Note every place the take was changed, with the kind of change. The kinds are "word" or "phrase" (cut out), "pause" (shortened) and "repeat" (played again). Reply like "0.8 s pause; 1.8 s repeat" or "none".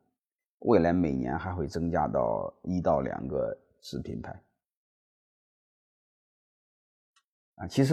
none